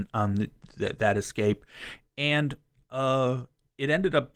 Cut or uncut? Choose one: uncut